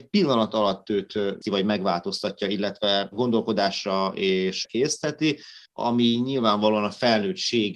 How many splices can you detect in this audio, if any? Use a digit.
3